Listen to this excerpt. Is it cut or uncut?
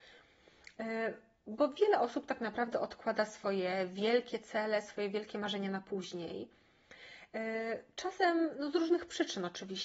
uncut